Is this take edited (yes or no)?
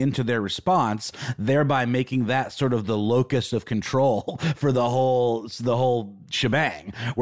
no